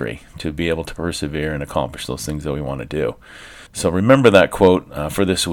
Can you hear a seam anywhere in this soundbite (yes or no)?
yes